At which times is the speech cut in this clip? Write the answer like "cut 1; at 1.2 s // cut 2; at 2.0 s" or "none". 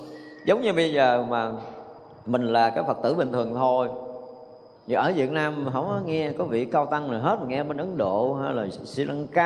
cut 1; at 2.2 s // cut 2; at 4.8 s